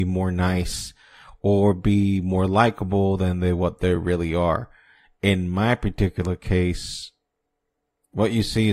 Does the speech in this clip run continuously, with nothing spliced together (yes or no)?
yes